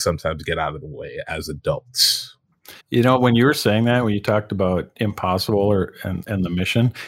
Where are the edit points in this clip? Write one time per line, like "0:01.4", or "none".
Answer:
0:02.8